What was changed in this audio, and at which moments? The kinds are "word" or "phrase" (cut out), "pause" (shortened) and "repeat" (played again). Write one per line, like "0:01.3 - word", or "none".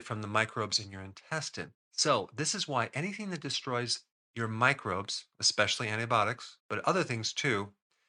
0:04.2 - pause
0:06.6 - pause